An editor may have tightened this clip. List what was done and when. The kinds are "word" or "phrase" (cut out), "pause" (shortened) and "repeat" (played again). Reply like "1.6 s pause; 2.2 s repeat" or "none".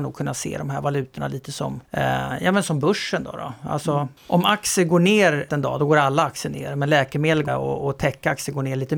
1.8 s pause; 4.2 s pause; 5.5 s word; 7.5 s phrase